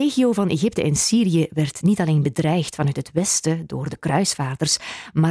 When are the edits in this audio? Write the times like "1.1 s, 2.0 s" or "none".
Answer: none